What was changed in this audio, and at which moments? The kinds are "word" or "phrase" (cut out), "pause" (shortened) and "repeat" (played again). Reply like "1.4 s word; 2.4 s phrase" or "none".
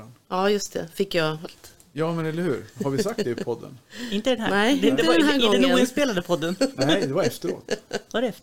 1.4 s word